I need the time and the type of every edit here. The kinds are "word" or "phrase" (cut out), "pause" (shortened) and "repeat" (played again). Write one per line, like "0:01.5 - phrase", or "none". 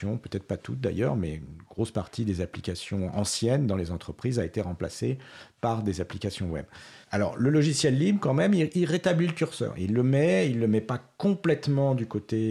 0:07.0 - pause